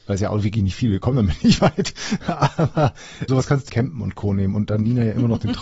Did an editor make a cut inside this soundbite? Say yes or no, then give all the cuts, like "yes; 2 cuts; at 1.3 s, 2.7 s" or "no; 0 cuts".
yes; 2 cuts; at 3.3 s, 3.7 s